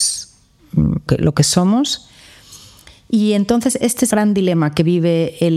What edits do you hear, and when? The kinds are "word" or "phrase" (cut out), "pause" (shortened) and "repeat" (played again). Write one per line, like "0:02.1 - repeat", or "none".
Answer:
0:01.1 - word
0:03.8 - word
0:04.1 - word